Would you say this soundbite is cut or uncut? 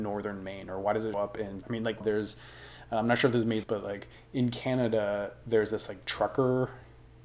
cut